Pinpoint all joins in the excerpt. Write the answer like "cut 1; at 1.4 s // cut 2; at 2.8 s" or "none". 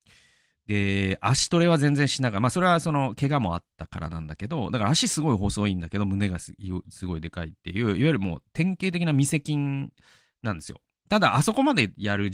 none